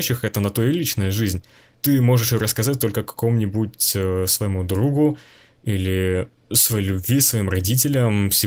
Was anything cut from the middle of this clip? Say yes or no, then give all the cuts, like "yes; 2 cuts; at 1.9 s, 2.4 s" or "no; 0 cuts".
no; 0 cuts